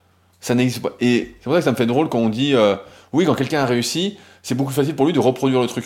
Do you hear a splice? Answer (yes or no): no